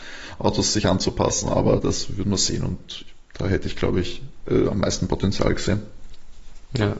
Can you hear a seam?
no; 0 cuts

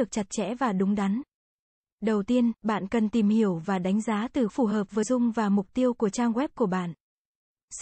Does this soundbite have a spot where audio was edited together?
yes; 2 cuts; at 4.5 s, 5.0 s

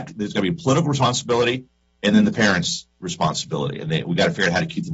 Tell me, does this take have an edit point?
no; 0 cuts

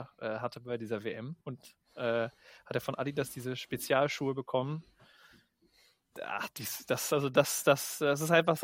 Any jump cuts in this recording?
yes; 1 cut; at 1.4 s

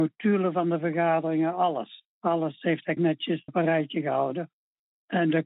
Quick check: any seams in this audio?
yes; 3 cuts; at 2.1 s, 3.0 s, 3.5 s

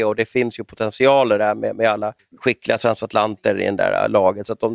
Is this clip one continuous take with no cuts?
no; 1 cut; at 2.2 s

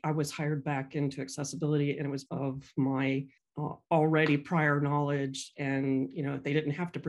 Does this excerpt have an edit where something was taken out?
yes; 2 cuts; at 2.3 s, 3.4 s

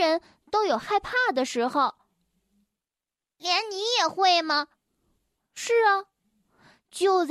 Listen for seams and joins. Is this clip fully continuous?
yes; 0 cuts

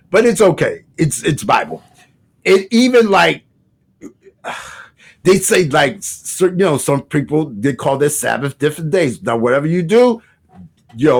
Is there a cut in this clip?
no; 0 cuts

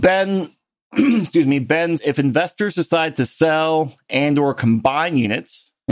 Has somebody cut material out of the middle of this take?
yes; 1 cut; at 2.0 s

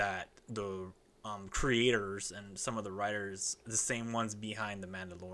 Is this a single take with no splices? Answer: yes; 0 cuts

